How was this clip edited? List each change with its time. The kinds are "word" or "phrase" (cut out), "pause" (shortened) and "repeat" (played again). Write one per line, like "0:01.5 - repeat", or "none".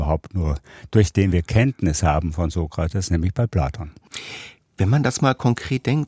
none